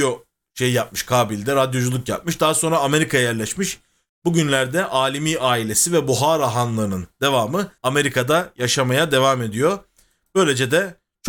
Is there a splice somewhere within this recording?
yes; 1 cut; at 7.8 s

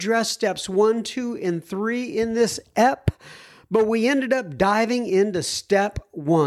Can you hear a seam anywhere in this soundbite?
no; 0 cuts

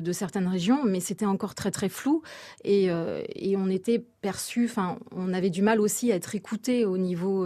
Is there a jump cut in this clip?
no; 0 cuts

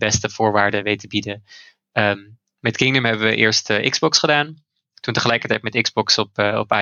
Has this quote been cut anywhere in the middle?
no; 0 cuts

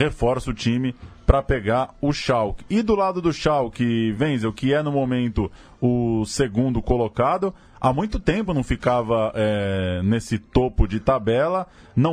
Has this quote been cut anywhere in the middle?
no; 0 cuts

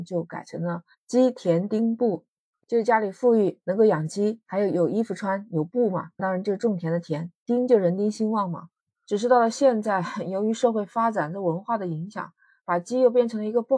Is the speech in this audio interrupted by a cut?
yes; 2 cuts; at 6.2 s, 7.4 s

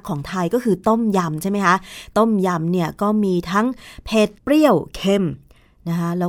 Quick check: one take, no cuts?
no; 1 cut; at 4.4 s

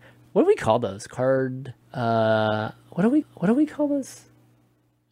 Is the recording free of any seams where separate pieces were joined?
no; 2 cuts; at 1.8 s, 3.2 s

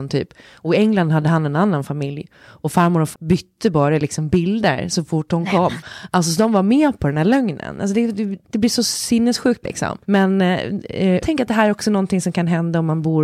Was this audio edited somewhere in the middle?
yes; 5 cuts; at 3.1 s, 8.4 s, 9.6 s, 10.0 s, 11.2 s

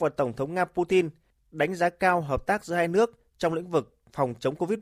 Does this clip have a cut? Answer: no; 0 cuts

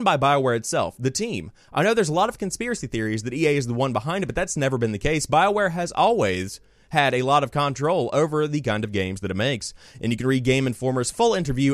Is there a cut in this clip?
no; 0 cuts

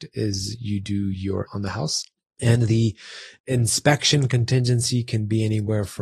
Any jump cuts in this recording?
yes; 1 cut; at 1.5 s

